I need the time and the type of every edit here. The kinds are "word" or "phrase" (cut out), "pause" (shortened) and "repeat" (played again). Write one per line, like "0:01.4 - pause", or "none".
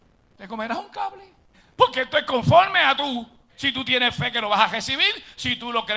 0:01.5 - pause
0:03.5 - pause